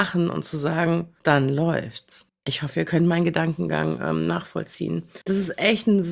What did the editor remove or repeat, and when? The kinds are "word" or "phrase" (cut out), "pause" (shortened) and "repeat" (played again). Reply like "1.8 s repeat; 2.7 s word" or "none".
1.2 s pause; 2.3 s pause; 5.2 s pause